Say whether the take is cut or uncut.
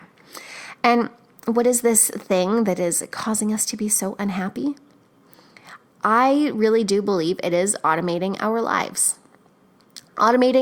uncut